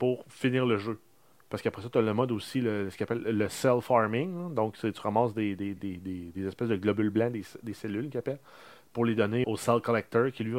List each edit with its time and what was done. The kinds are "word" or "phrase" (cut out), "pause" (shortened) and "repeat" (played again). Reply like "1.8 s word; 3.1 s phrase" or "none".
5.8 s word; 9.4 s word